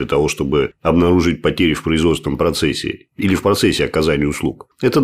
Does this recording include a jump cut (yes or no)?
no